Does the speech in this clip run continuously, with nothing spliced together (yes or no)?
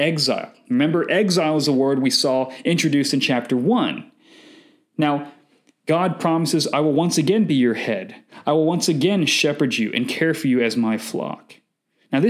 yes